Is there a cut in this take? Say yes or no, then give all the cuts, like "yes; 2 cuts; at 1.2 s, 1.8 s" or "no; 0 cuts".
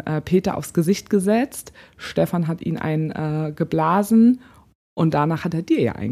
no; 0 cuts